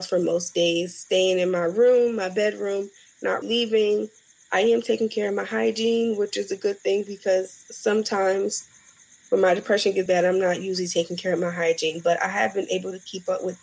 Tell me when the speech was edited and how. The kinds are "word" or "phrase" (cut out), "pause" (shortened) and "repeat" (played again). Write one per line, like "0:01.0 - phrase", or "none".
0:03.4 - word
0:10.1 - word